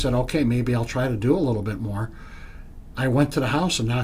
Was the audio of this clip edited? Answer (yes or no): no